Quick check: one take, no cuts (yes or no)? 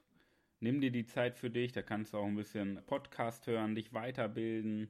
no